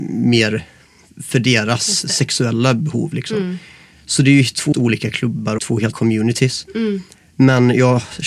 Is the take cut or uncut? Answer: cut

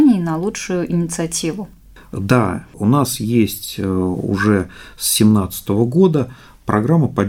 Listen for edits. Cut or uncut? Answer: uncut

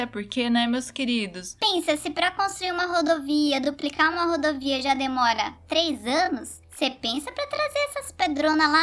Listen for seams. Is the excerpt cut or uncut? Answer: uncut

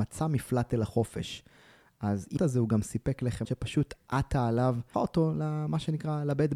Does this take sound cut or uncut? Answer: cut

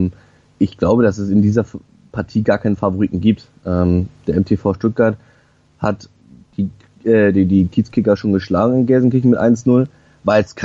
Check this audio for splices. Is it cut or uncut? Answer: uncut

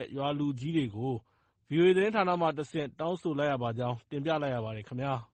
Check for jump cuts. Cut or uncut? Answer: uncut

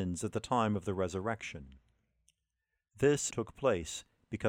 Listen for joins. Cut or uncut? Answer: cut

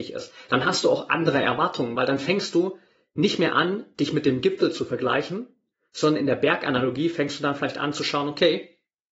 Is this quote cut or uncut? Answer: uncut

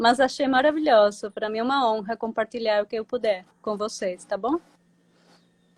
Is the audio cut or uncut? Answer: uncut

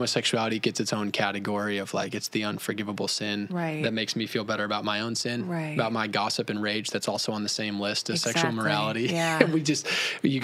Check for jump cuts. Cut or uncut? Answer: uncut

